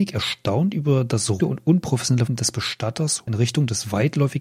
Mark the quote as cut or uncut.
cut